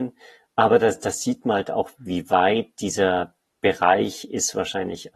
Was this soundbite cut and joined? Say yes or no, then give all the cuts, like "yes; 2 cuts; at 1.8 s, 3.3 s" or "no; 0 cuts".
yes; 1 cut; at 1.9 s